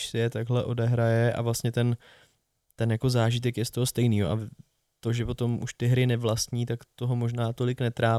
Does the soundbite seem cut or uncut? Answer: uncut